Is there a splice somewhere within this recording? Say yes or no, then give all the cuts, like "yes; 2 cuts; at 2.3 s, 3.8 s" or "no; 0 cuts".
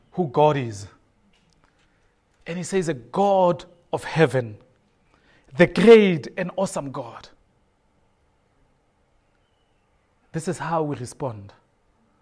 no; 0 cuts